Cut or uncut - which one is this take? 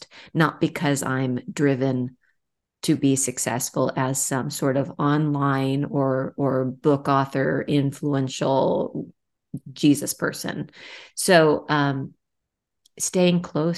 uncut